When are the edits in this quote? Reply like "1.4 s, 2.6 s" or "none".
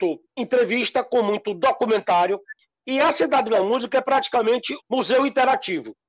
4.8 s